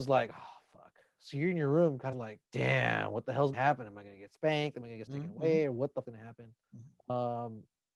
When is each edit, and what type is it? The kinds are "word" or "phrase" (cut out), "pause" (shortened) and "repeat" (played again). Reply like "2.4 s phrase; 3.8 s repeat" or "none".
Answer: 2.1 s phrase; 2.4 s pause; 3.5 s word; 5.1 s word; 6.0 s word; 6.6 s pause